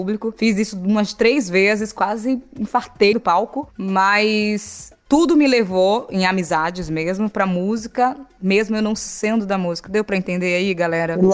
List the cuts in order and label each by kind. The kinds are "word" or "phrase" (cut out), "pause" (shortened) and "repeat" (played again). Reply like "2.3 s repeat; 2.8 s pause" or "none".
3.1 s phrase

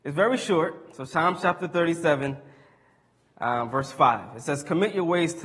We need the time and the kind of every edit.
none

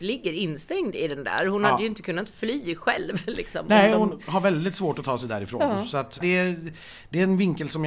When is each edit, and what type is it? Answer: 6.2 s word

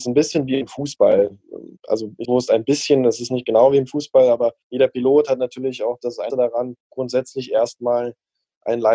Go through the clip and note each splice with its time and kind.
1.8 s pause; 2.2 s word; 4.6 s pause; 6.3 s word; 6.8 s pause

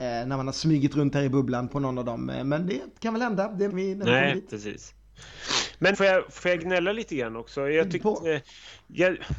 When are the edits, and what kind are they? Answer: 1.7 s word; 3.7 s word; 5.9 s word; 6.4 s word; 8.0 s word

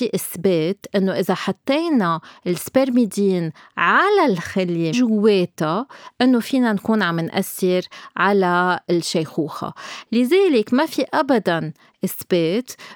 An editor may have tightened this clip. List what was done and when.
4.9 s word

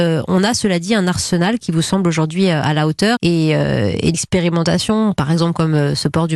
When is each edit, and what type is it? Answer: 3.2 s word; 4.1 s word

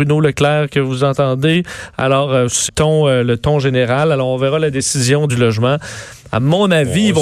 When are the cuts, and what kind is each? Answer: 2.7 s word; 5.3 s phrase

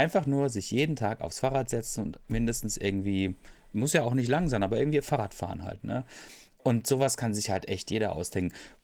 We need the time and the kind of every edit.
none

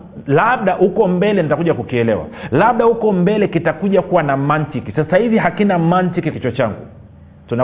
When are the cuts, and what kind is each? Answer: 6.3 s word

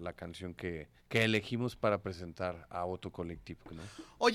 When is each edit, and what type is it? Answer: 1.0 s pause

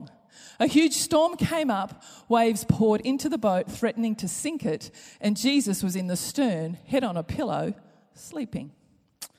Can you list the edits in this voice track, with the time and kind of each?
none

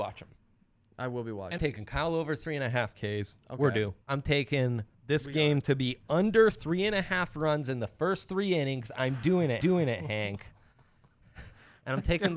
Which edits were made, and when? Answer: 1.6 s word; 4.0 s pause; 4.9 s pause; 9.6 s repeat

